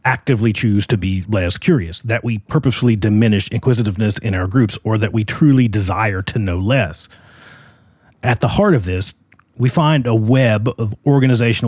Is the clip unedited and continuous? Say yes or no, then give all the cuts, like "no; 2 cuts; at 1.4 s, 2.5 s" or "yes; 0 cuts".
yes; 0 cuts